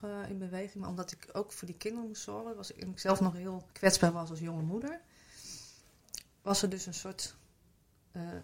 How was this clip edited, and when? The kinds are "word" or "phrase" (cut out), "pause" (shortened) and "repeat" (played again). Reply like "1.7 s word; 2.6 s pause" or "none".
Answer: 3.7 s pause